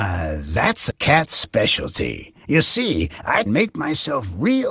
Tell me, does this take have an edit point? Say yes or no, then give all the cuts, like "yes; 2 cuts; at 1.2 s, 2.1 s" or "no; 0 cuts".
yes; 3 cuts; at 0.9 s, 2.4 s, 3.5 s